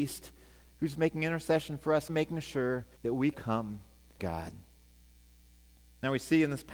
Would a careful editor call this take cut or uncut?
cut